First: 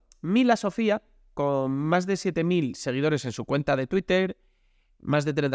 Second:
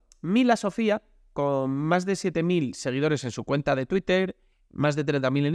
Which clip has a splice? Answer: second; 1 cut; at 4.5 s

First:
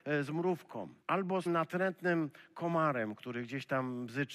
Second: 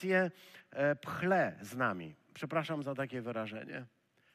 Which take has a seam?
first; 2 cuts; at 1.0 s, 1.5 s

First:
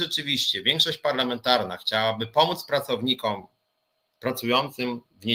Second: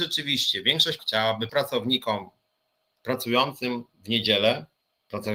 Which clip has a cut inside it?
second; 2 cuts; at 1.0 s, 1.5 s

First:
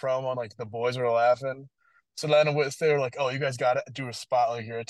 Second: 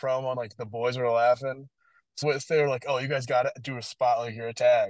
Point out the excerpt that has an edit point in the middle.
second; 1 cut; at 2.2 s

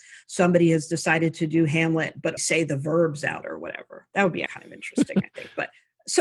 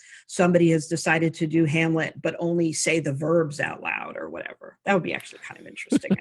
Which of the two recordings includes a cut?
first; 3 cuts; at 2.4 s, 3.4 s, 4.5 s

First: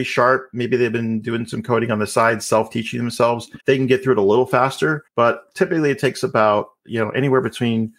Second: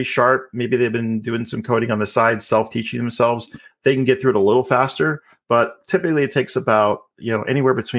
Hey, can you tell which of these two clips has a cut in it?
first; 2 cuts; at 3.6 s, 5.1 s

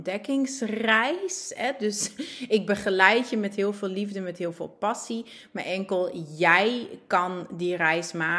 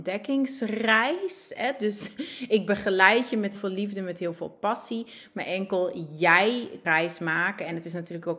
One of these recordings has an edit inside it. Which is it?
second; 2 cuts; at 3.6 s, 6.8 s

